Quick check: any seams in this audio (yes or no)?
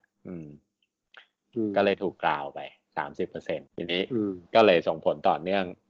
yes